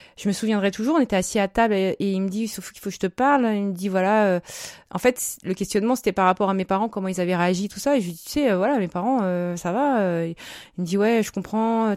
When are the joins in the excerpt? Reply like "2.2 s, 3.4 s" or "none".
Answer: none